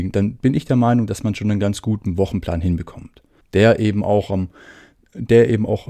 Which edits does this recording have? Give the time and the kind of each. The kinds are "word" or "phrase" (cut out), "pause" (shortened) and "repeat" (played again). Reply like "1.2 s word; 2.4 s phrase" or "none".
3.4 s pause